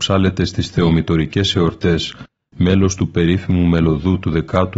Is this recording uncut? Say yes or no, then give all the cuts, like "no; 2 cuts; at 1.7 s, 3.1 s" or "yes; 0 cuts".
yes; 0 cuts